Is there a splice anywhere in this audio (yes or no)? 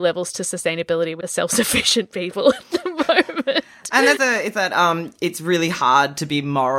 yes